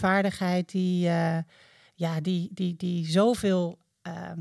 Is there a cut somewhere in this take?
no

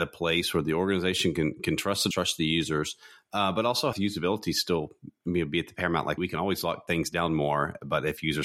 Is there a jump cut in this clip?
yes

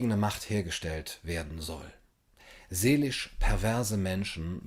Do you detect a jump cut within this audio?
no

